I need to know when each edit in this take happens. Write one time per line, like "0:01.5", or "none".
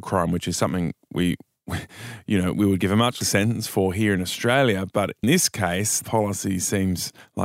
0:03.2
0:05.2
0:06.0